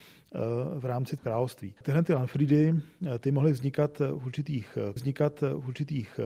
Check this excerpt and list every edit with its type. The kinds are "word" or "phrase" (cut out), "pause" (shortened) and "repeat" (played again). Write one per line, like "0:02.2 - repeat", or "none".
0:01.2 - word
0:01.8 - pause
0:05.0 - repeat

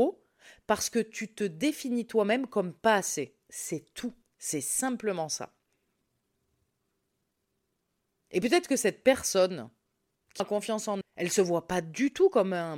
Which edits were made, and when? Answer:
0:10.4 - word
0:11.0 - word

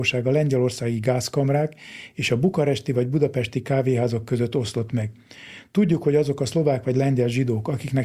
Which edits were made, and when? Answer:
none

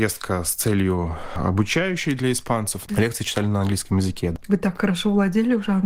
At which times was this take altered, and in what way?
none

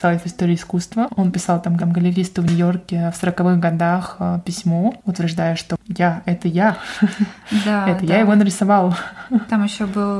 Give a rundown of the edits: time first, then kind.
0:01.8 - repeat

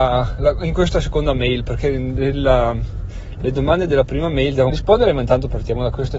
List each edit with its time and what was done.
0:04.7 - word

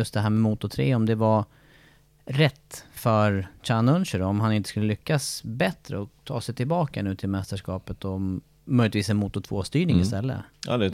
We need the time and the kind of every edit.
none

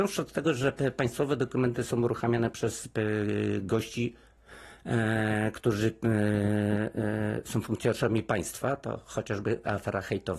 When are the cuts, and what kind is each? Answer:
none

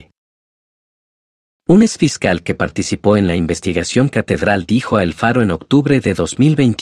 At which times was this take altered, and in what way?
none

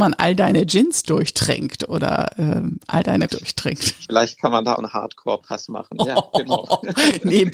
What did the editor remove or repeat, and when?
0:03.3 - word
0:04.8 - phrase

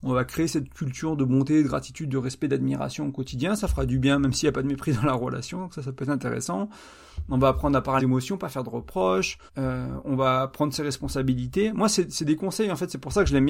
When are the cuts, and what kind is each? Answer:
0:08.0 - phrase
0:09.5 - pause

